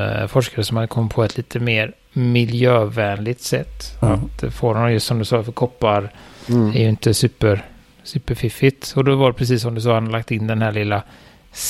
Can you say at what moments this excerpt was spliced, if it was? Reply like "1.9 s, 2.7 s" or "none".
none

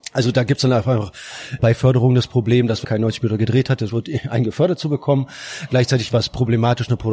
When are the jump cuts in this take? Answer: 1.6 s, 2.8 s, 3.9 s

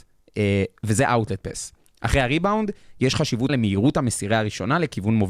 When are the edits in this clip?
3.5 s

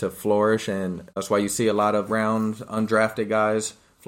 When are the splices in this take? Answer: 1.1 s, 2.1 s

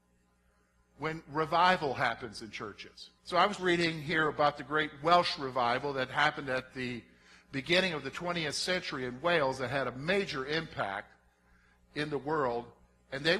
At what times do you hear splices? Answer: 3.2 s, 3.6 s

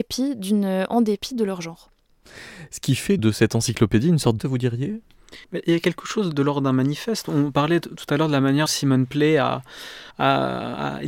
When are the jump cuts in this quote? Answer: 3.2 s, 4.4 s, 5.4 s, 6.3 s, 8.7 s, 10.1 s

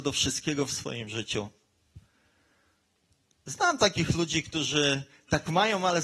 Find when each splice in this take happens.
none

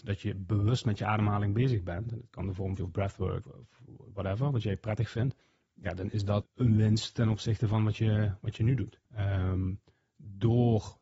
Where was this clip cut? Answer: 2.8 s, 3.4 s, 5.4 s, 6.4 s, 9.0 s

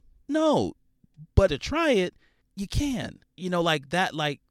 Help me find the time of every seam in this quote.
1.5 s, 2.4 s, 3.2 s

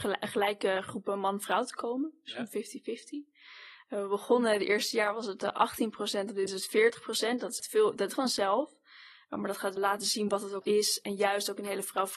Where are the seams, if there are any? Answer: 6.5 s, 7.6 s, 8.2 s, 9.8 s, 10.6 s

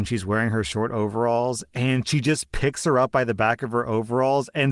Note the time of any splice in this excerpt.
none

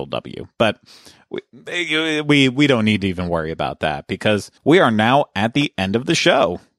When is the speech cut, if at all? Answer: 4.6 s

